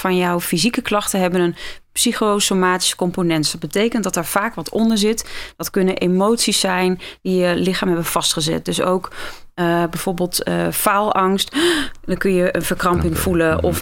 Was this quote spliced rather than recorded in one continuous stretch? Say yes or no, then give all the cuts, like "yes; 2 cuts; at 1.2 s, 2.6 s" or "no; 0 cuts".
no; 0 cuts